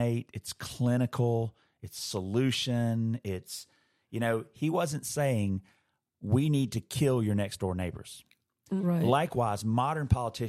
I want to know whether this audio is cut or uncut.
uncut